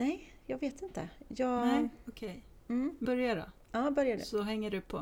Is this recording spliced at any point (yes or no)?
yes